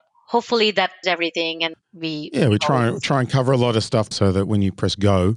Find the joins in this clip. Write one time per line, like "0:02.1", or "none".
0:01.0
0:01.7
0:04.1